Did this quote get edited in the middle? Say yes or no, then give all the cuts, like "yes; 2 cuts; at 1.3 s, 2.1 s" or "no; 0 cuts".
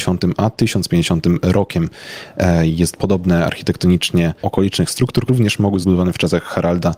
yes; 4 cuts; at 2.9 s, 4.4 s, 5.3 s, 5.8 s